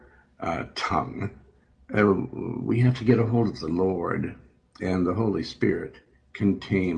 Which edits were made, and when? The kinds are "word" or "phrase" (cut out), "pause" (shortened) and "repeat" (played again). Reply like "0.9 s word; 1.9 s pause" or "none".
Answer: none